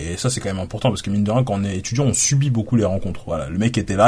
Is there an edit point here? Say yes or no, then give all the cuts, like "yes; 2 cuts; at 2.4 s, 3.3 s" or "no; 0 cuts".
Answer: no; 0 cuts